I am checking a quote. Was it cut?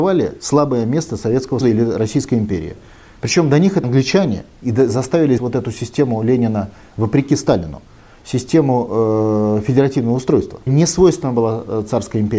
yes; 4 cuts; at 1.6 s, 3.8 s, 5.4 s, 10.7 s

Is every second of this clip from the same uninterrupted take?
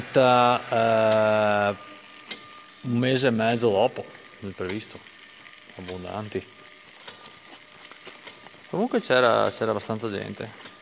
yes; 0 cuts

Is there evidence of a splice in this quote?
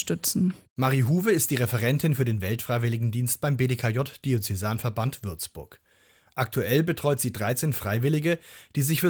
no; 0 cuts

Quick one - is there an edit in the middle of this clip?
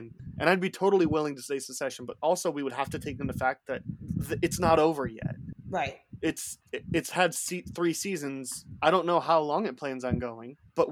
no; 0 cuts

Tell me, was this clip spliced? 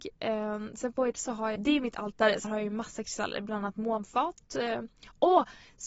yes; 4 cuts; at 1.1 s, 1.6 s, 2.4 s, 3.8 s

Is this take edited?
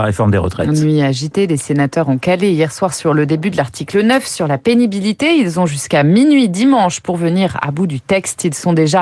no; 0 cuts

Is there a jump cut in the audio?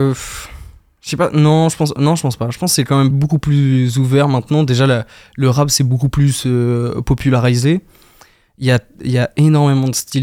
no; 0 cuts

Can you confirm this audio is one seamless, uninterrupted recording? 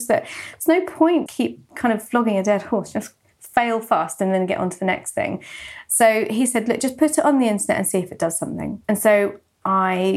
no; 2 cuts; at 1.3 s, 8.8 s

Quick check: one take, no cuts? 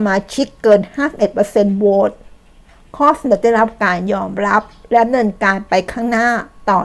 yes; 0 cuts

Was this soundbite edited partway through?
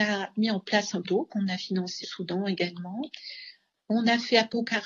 yes; 2 cuts; at 1.0 s, 2.0 s

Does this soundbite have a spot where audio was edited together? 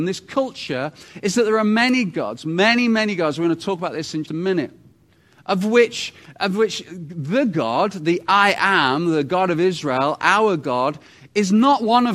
yes; 1 cut; at 4.2 s

